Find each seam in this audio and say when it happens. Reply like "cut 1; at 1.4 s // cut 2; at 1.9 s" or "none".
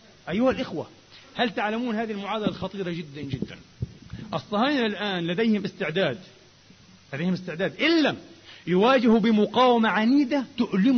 none